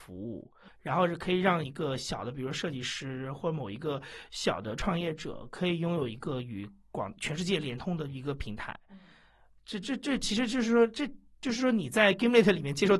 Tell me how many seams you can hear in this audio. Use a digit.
1